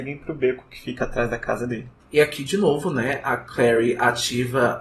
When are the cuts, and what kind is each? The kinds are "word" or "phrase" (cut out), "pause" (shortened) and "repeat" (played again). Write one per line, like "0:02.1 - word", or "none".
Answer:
none